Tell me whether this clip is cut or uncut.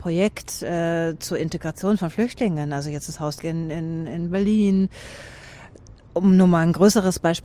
cut